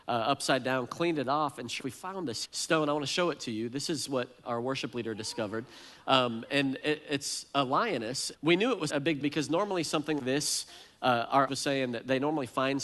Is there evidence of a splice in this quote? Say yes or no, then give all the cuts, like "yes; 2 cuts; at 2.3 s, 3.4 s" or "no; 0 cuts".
yes; 8 cuts; at 1.8 s, 2.4 s, 4.4 s, 8.3 s, 8.9 s, 9.2 s, 10.2 s, 11.5 s